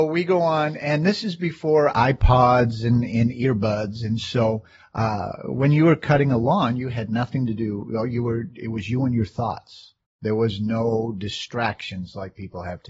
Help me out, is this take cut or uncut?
uncut